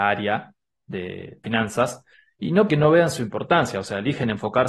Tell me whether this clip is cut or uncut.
cut